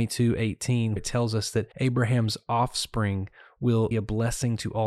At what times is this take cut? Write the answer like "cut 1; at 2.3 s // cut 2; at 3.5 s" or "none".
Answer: cut 1; at 1.0 s // cut 2; at 1.7 s // cut 3; at 3.9 s